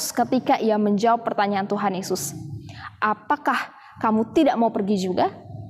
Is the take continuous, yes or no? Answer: yes